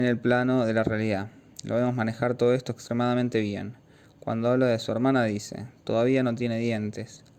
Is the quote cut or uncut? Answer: uncut